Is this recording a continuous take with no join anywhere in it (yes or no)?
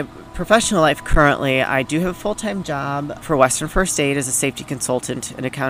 no